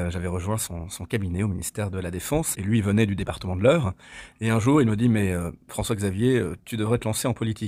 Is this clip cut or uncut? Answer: cut